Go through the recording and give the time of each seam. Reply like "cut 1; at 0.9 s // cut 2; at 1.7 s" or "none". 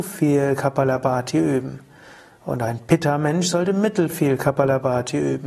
none